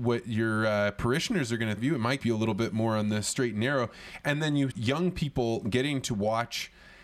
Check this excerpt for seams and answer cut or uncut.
cut